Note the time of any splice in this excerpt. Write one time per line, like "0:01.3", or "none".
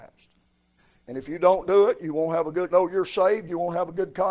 0:02.7